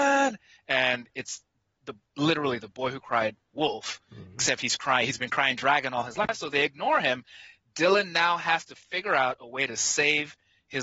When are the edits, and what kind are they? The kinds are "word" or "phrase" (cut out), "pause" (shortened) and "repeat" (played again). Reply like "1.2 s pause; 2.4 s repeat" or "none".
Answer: none